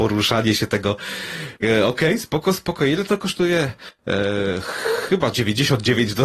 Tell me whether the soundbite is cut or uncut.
cut